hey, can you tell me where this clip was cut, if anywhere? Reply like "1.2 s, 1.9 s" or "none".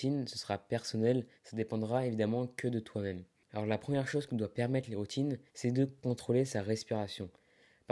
1.4 s, 5.5 s